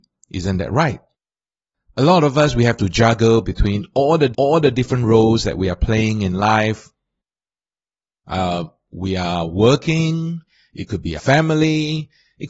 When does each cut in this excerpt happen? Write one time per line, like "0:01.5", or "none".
0:04.3
0:11.2